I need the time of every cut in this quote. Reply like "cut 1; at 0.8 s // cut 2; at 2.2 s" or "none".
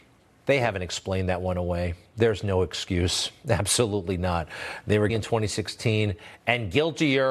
cut 1; at 5.1 s